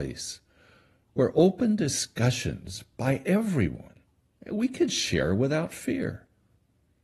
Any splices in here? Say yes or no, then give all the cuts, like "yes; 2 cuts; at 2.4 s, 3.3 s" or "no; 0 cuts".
no; 0 cuts